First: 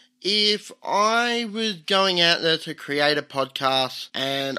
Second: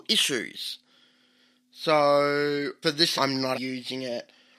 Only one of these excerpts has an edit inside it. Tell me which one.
second; 3 cuts; at 2.8 s, 3.2 s, 3.5 s

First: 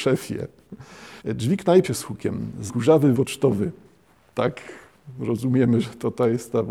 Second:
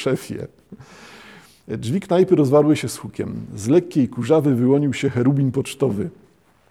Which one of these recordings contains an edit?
first; 4 cuts; at 1.2 s, 1.8 s, 2.7 s, 3.1 s

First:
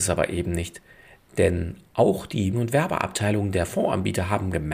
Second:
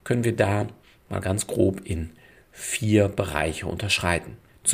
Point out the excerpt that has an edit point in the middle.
first; 1 cut; at 2.5 s

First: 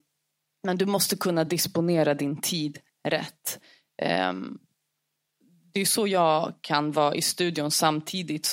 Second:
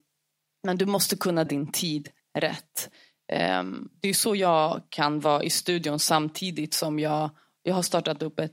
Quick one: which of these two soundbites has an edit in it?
second; 2 cuts; at 1.5 s, 4.0 s

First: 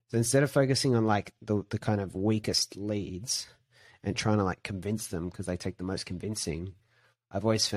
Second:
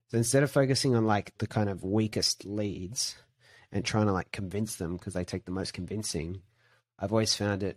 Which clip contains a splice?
second; 1 cut; at 1.4 s

